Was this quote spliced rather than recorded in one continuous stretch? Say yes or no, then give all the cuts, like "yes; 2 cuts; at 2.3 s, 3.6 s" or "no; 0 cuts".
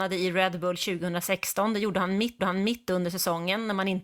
yes; 1 cut; at 2.4 s